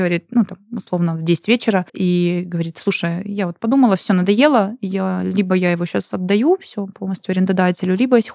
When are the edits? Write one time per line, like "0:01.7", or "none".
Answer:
0:01.9